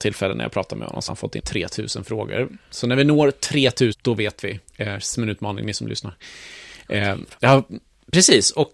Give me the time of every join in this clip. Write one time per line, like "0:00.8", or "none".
0:01.1
0:01.4
0:03.9
0:04.7
0:05.1
0:07.4

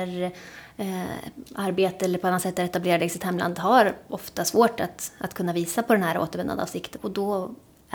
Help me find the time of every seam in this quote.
0:07.0

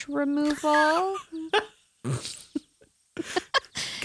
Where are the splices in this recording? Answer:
none

